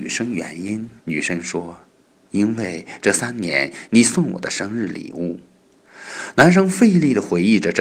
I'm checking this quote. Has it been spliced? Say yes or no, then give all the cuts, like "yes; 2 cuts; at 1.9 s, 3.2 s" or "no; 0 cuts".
yes; 2 cuts; at 1.0 s, 1.9 s